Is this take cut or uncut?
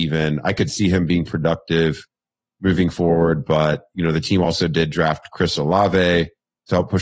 uncut